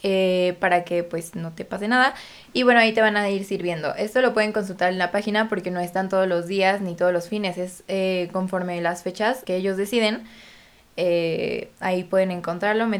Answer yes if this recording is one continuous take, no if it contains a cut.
no